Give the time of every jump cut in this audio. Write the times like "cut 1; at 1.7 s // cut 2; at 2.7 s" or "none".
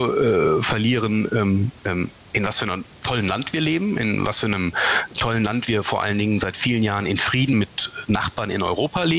none